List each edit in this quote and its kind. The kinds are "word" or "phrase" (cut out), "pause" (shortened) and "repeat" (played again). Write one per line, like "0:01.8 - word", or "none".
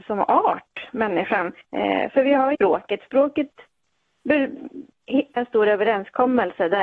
0:01.6 - pause
0:02.5 - word
0:05.4 - phrase